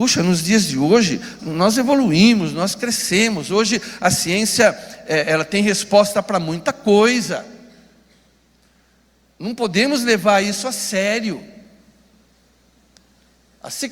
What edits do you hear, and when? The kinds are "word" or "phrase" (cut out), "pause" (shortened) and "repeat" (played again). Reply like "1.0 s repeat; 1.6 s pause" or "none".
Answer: 1.4 s word